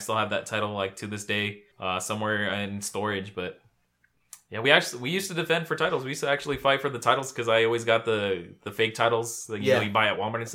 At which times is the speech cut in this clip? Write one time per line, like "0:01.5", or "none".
0:01.7
0:04.6